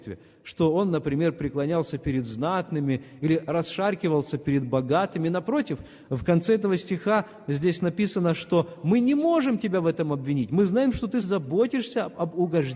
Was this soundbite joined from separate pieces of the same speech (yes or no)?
yes